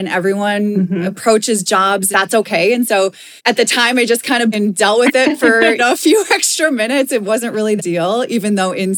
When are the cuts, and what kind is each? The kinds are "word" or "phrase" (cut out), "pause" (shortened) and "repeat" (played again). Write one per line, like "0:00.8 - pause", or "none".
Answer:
0:02.1 - phrase
0:03.4 - pause
0:04.5 - phrase
0:05.8 - word
0:07.8 - phrase